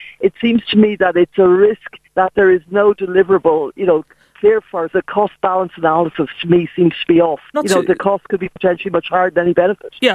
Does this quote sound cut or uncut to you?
cut